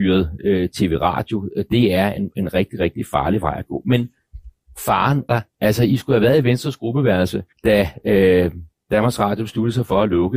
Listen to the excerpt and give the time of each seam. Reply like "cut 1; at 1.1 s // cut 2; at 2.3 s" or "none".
cut 1; at 5.3 s // cut 2; at 7.5 s